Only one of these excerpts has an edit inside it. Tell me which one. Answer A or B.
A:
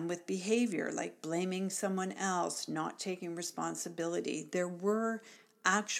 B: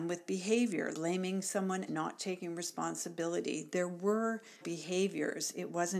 B